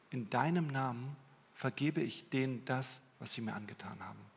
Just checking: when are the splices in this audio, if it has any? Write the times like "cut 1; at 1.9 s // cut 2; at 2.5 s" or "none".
none